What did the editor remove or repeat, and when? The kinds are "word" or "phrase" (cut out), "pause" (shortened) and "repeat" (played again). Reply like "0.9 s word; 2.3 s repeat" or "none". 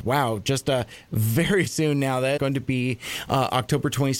1.7 s word; 2.4 s word